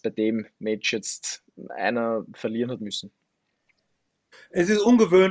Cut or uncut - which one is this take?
uncut